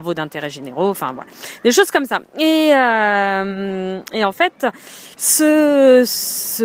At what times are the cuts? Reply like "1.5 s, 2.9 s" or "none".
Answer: 5.1 s